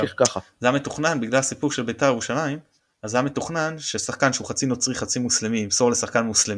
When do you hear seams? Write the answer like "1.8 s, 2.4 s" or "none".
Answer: none